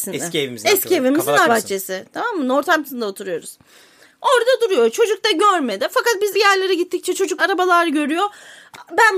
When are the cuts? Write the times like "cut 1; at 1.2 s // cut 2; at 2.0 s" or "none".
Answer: cut 1; at 1.5 s // cut 2; at 6.3 s // cut 3; at 7.4 s